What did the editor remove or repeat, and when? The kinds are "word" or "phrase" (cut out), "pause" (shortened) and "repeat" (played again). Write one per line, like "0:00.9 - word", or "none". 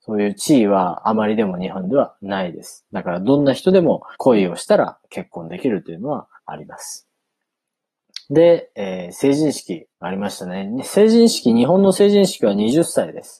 0:04.1 - pause
0:06.4 - pause
0:09.9 - pause